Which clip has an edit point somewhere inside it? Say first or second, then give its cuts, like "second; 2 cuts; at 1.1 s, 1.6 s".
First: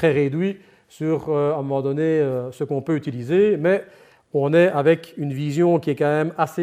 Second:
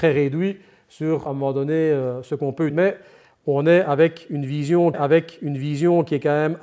second; 3 cuts; at 1.3 s, 2.7 s, 4.9 s